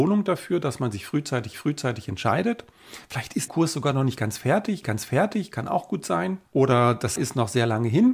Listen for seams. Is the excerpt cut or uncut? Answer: cut